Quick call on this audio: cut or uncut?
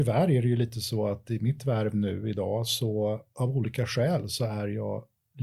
uncut